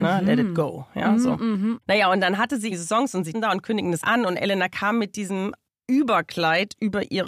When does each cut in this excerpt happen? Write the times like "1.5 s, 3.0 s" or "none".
2.7 s, 3.3 s, 4.0 s, 5.7 s